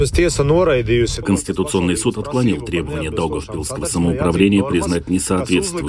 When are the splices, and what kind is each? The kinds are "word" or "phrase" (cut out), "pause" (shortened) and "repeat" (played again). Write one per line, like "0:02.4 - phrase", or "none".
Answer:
none